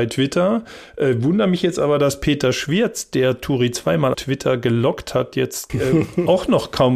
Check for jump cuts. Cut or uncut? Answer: cut